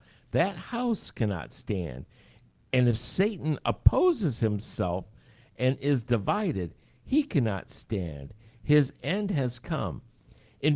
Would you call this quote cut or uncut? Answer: uncut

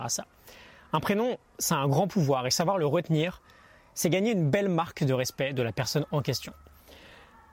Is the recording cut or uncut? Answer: uncut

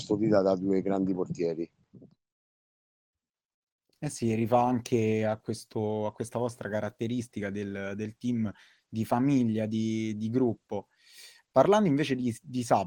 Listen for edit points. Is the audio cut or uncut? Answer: uncut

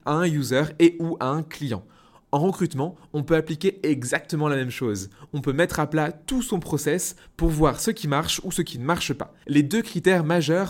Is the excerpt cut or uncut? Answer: uncut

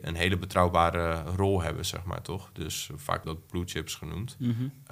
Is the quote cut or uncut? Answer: cut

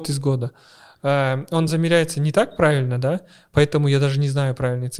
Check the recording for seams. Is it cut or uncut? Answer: uncut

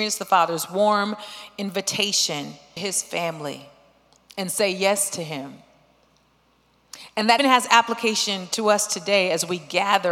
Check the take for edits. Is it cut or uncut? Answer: cut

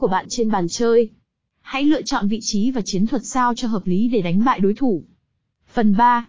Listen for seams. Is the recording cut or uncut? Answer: uncut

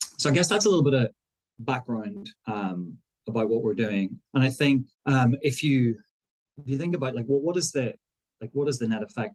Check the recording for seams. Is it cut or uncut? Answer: cut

